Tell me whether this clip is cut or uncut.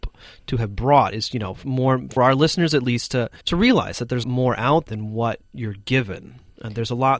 cut